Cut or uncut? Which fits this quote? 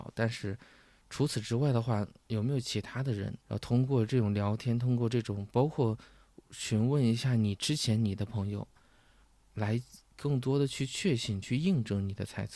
cut